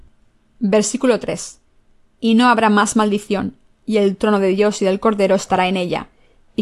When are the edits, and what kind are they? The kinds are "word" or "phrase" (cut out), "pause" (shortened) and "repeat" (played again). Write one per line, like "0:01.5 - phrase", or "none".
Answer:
none